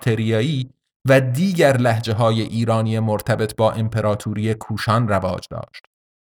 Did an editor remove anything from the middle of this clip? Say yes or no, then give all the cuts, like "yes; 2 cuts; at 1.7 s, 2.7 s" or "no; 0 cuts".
no; 0 cuts